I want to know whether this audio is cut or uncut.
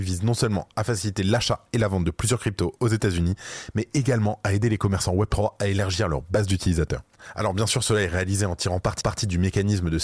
cut